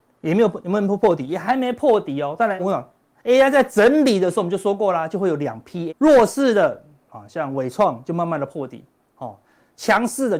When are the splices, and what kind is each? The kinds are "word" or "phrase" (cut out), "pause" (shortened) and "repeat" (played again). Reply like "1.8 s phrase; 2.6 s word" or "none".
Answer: 2.6 s word; 5.9 s word